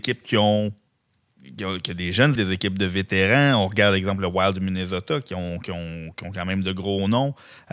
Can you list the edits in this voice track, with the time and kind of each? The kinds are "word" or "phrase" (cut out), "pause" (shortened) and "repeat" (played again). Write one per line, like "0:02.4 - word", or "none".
0:02.4 - word